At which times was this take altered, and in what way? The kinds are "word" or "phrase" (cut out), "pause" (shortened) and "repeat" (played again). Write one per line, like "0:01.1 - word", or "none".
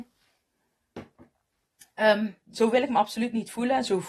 0:02.4 - phrase